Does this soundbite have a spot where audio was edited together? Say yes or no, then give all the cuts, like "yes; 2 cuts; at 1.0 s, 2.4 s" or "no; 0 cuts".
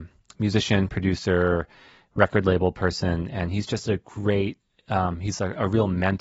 no; 0 cuts